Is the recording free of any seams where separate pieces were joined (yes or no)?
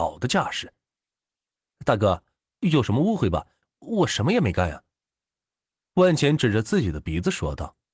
yes